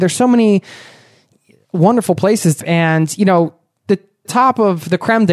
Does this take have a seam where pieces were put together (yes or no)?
yes